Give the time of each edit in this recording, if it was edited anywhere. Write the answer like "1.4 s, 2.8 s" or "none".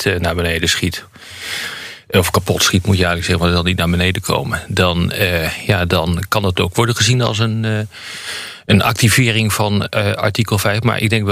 none